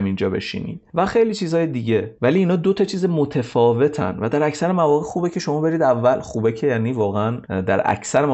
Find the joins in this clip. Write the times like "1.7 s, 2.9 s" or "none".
none